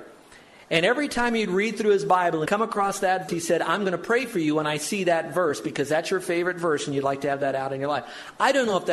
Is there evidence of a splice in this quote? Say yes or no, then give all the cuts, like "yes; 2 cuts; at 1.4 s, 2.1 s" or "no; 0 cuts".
yes; 2 cuts; at 2.5 s, 3.3 s